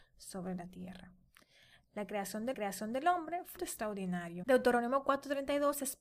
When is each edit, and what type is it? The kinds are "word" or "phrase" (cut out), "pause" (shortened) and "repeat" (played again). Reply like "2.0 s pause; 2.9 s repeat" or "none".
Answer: 2.5 s repeat; 3.6 s phrase